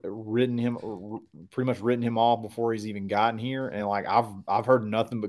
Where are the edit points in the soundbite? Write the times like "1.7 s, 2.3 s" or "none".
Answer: none